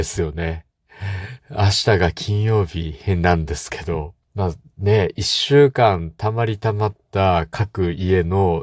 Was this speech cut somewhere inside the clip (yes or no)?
yes